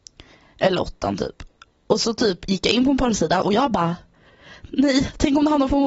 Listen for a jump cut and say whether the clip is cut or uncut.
uncut